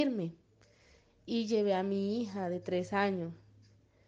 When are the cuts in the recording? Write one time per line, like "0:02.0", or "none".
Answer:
none